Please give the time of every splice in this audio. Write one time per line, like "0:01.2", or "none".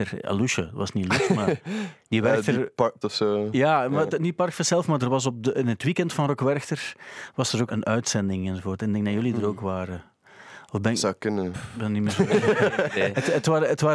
0:03.0
0:05.0
0:07.7